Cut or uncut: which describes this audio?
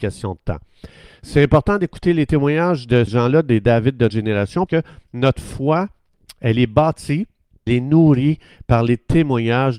cut